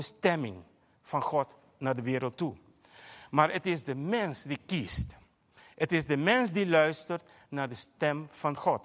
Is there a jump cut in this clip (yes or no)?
no